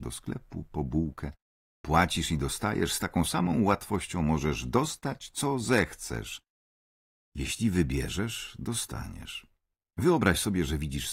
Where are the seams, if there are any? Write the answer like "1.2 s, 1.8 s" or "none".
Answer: none